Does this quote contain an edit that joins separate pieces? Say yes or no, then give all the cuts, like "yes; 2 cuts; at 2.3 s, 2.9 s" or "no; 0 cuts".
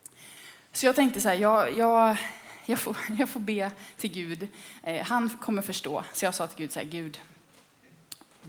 no; 0 cuts